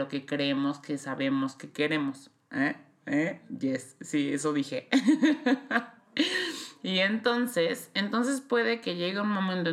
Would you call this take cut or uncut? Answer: uncut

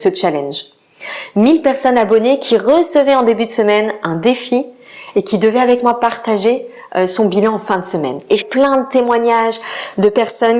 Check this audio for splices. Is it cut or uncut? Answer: cut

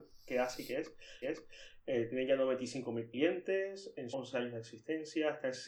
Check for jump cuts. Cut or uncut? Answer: cut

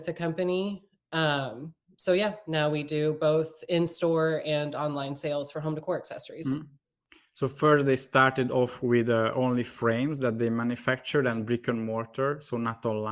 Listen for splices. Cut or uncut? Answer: uncut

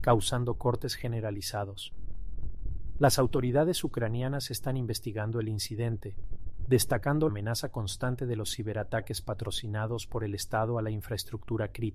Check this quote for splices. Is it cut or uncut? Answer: cut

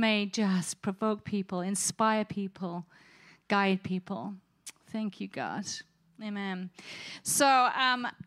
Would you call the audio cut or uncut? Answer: uncut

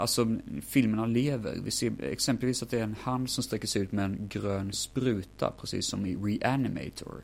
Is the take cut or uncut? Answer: uncut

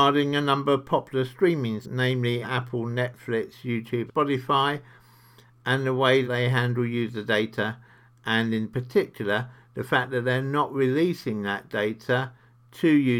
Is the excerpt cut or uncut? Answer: cut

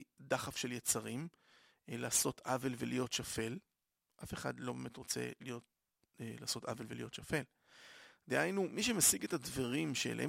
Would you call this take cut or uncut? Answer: uncut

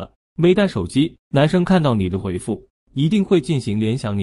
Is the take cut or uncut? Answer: cut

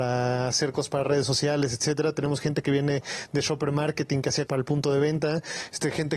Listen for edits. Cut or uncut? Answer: cut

